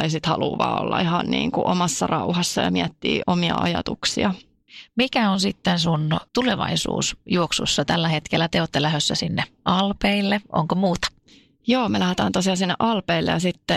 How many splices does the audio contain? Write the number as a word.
two